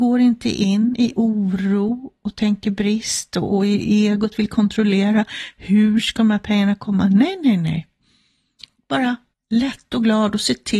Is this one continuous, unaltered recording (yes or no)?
no